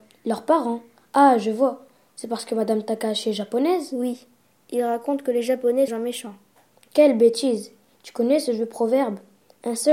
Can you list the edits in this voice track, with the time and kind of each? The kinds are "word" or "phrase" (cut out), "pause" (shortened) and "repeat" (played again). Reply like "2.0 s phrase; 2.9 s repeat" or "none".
5.9 s phrase